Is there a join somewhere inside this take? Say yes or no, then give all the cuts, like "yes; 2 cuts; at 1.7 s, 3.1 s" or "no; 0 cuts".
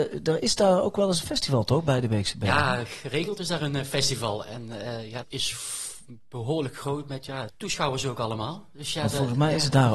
yes; 2 cuts; at 5.2 s, 7.5 s